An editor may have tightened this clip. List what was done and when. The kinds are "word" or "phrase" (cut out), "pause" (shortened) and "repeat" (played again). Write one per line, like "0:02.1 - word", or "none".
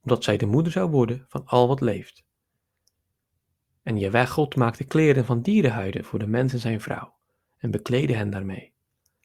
none